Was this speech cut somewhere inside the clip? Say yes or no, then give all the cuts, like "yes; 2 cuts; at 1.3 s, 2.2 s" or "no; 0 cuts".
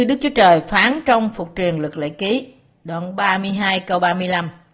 no; 0 cuts